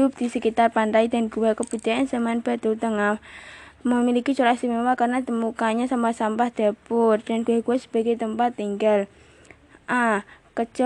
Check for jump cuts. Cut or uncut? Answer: uncut